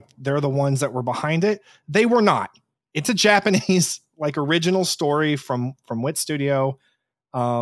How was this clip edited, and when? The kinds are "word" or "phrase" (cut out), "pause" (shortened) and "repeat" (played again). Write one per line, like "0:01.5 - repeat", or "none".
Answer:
none